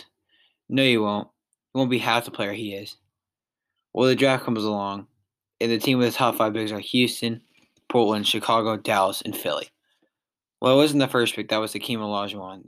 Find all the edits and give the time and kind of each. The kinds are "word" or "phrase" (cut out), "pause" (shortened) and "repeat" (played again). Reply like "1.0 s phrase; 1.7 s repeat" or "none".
none